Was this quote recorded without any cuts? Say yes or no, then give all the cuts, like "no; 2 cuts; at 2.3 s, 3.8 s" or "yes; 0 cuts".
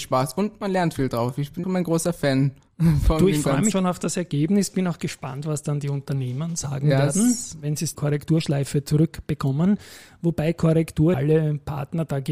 no; 4 cuts; at 1.6 s, 3.7 s, 7.9 s, 11.1 s